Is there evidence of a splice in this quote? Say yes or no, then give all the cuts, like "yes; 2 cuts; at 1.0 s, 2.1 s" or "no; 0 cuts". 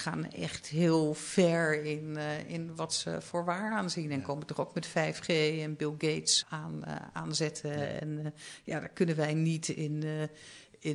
yes; 1 cut; at 6.4 s